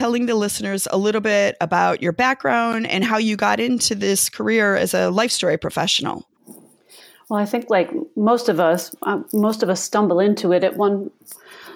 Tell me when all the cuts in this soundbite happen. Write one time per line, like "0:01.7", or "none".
0:06.4